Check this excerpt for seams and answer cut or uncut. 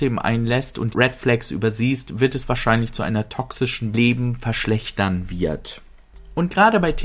cut